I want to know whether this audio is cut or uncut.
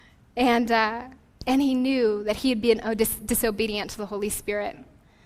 uncut